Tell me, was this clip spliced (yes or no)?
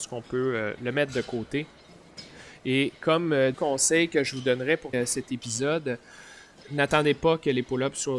yes